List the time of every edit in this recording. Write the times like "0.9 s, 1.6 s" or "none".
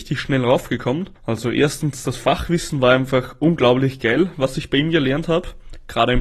1.2 s